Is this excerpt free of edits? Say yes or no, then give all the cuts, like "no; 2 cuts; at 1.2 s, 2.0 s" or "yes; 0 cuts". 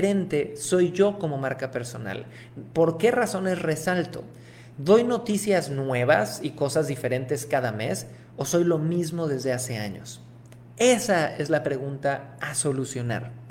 yes; 0 cuts